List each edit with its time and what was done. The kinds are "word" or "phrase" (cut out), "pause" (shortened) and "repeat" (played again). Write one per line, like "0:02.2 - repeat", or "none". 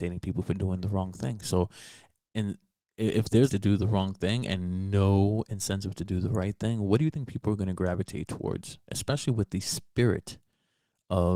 0:02.6 - word
0:03.5 - word